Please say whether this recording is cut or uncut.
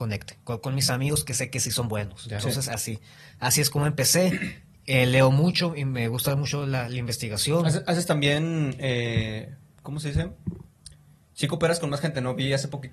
uncut